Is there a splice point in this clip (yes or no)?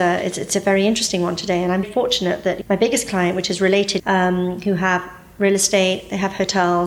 yes